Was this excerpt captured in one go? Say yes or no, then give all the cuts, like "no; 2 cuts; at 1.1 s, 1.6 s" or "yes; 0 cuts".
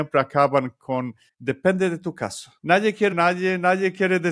no; 3 cuts; at 1.3 s, 2.6 s, 3.1 s